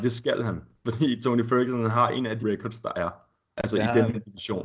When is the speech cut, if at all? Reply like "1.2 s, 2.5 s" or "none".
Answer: 2.4 s, 3.3 s